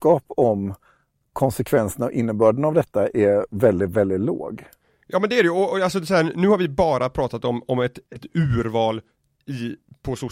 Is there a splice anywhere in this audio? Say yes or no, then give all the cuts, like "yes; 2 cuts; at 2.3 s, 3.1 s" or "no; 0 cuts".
no; 0 cuts